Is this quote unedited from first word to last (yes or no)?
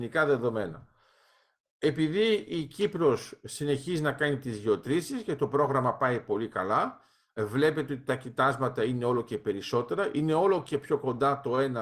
yes